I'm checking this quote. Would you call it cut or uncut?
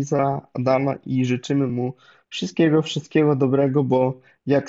uncut